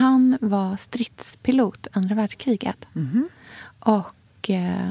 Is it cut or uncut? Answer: cut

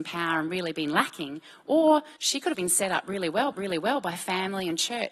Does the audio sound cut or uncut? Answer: cut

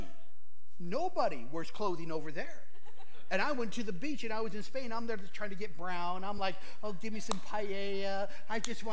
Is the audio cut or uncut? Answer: uncut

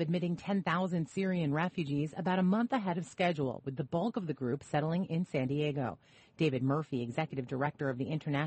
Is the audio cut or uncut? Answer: uncut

